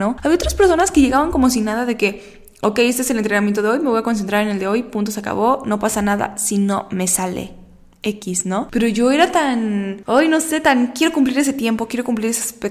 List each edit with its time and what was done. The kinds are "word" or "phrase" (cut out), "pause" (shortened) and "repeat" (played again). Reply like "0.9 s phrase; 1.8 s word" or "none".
none